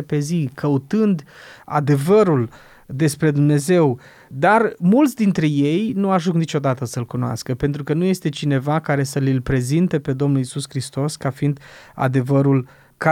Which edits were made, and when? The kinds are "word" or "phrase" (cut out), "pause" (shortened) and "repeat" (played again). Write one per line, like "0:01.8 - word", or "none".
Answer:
none